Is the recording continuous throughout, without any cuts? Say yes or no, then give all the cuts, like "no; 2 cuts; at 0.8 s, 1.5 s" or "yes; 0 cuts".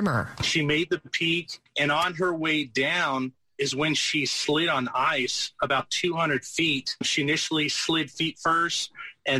yes; 0 cuts